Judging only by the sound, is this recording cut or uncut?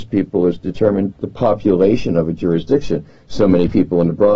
cut